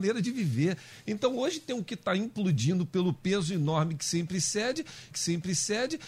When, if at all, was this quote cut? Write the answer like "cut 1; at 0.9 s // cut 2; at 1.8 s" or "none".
cut 1; at 5.1 s